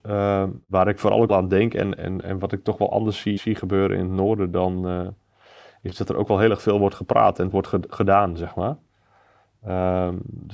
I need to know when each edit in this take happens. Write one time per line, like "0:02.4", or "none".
0:01.3
0:03.4
0:07.5